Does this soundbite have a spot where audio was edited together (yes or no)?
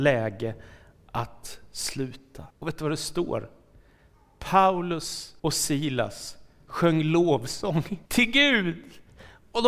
yes